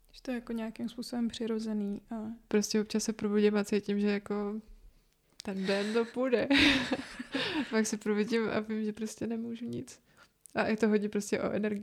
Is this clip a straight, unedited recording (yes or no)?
yes